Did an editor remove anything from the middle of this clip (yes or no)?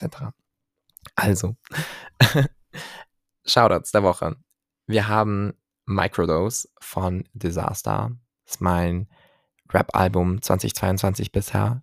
no